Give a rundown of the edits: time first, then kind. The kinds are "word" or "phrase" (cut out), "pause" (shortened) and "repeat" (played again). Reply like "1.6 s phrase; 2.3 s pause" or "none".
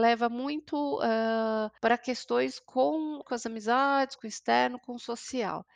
1.8 s pause; 3.2 s phrase; 4.2 s phrase